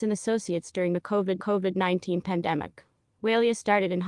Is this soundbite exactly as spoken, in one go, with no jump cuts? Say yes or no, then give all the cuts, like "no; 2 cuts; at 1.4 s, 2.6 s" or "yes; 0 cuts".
no; 1 cut; at 1.4 s